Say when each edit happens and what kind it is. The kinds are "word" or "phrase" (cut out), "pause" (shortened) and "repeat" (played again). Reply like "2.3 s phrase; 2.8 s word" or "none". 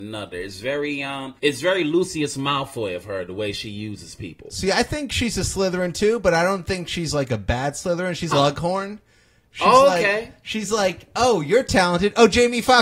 1.4 s pause; 8.3 s word